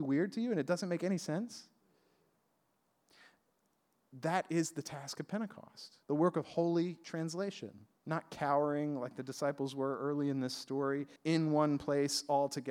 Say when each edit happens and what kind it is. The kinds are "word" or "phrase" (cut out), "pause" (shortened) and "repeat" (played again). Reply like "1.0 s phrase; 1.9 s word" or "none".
6.0 s pause; 8.0 s pause; 11.2 s pause